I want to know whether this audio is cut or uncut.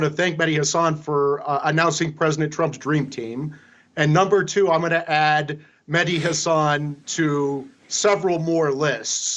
uncut